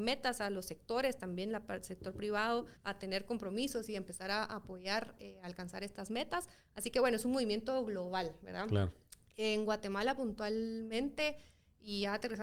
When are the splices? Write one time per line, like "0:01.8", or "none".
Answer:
0:02.8